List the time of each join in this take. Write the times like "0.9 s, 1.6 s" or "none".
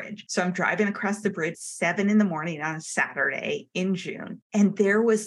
1.5 s